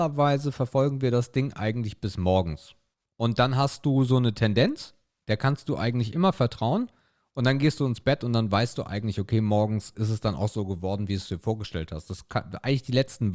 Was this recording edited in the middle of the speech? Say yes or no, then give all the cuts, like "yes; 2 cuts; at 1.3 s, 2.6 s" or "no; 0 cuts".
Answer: no; 0 cuts